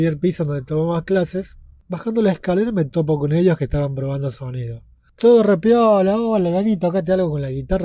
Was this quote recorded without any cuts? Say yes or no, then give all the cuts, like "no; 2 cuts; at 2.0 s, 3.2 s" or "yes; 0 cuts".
yes; 0 cuts